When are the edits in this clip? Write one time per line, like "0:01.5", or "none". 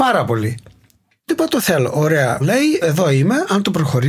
0:01.3
0:02.4
0:02.8